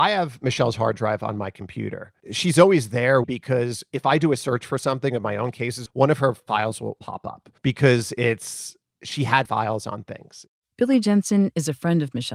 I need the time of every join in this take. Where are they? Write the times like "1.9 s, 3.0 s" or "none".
2.2 s, 3.2 s, 5.9 s, 7.6 s, 9.5 s, 10.6 s